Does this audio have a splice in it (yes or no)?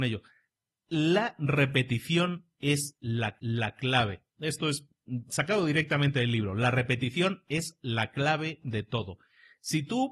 yes